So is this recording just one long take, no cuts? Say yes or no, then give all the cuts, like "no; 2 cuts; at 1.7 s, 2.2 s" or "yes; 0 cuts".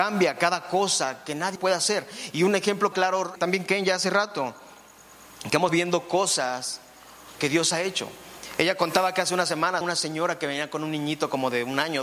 no; 6 cuts; at 1.6 s, 2.9 s, 3.4 s, 5.7 s, 7.4 s, 9.8 s